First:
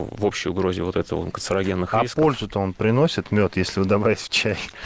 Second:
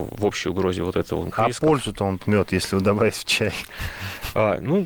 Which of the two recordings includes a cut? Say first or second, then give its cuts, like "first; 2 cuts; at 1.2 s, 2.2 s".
second; 2 cuts; at 1.3 s, 2.2 s